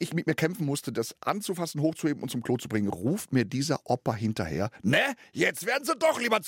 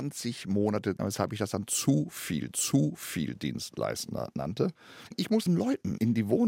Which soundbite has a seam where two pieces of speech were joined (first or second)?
second